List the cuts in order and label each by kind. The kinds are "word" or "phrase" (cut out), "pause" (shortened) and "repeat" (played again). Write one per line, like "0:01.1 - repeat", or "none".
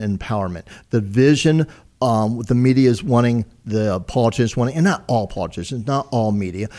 none